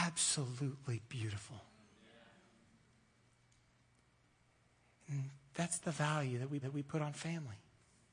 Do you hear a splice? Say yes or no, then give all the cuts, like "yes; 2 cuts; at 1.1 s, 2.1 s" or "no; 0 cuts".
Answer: yes; 1 cut; at 6.6 s